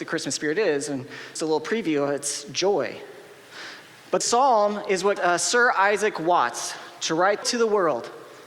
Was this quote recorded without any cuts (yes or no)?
no